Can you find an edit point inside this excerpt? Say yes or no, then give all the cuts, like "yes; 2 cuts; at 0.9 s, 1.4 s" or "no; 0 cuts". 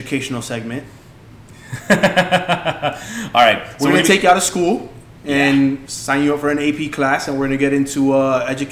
yes; 1 cut; at 1.0 s